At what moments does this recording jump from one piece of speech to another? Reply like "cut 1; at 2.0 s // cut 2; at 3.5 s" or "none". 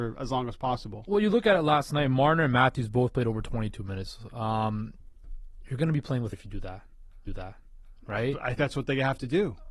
cut 1; at 6.3 s // cut 2; at 7.3 s // cut 3; at 8.6 s

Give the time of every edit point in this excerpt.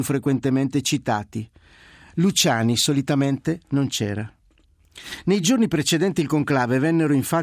none

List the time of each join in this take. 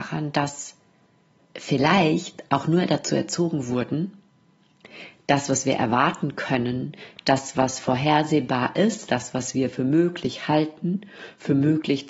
cut 1; at 1.4 s

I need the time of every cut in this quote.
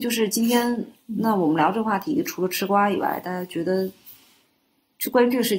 cut 1; at 0.9 s

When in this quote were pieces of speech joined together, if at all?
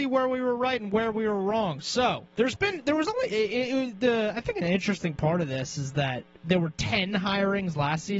cut 1; at 2.3 s

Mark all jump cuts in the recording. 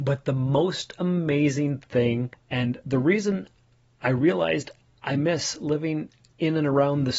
none

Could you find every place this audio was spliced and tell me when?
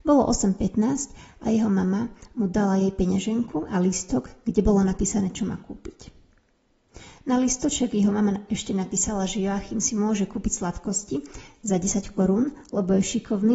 none

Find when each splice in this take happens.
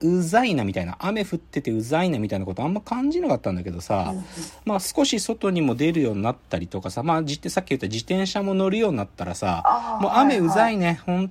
none

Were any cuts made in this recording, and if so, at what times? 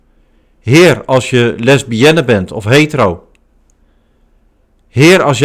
none

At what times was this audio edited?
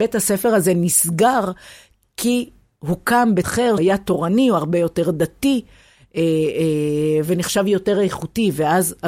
cut 1; at 3.4 s // cut 2; at 3.8 s

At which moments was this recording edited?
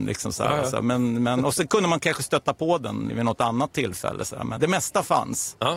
cut 1; at 3.1 s // cut 2; at 4.6 s

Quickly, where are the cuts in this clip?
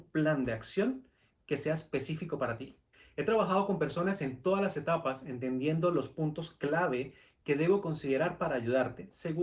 none

